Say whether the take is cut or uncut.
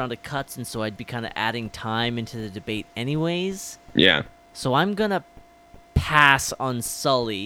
cut